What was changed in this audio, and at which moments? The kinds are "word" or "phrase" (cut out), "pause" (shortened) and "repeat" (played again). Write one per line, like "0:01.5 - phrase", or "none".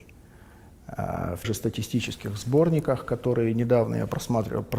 0:01.4 - word